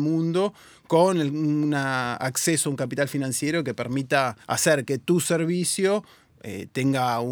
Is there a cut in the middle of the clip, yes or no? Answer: yes